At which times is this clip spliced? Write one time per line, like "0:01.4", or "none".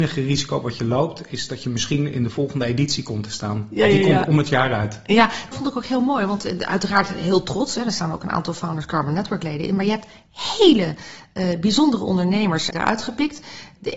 0:05.5
0:12.7